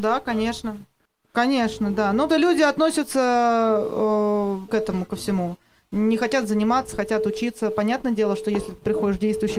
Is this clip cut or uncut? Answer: cut